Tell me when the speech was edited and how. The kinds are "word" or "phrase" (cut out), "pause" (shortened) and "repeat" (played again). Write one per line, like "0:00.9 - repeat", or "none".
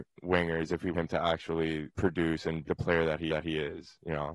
0:00.9 - word
0:01.9 - pause
0:02.6 - word
0:03.3 - repeat